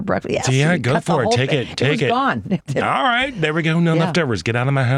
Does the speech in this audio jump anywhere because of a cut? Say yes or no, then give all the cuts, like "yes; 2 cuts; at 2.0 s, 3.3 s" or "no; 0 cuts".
yes; 1 cut; at 2.6 s